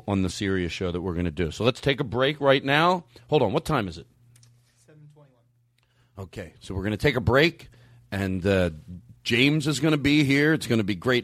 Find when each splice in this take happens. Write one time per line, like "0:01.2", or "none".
none